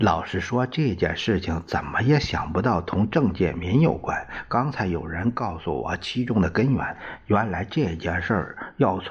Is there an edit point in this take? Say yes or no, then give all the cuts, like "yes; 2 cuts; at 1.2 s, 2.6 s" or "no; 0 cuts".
no; 0 cuts